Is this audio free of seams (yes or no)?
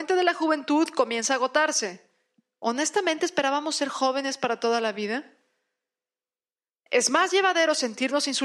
yes